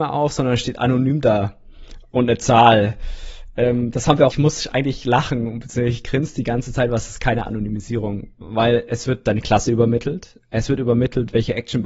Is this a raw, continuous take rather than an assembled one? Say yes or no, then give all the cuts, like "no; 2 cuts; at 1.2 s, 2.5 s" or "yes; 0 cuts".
no; 1 cut; at 4.3 s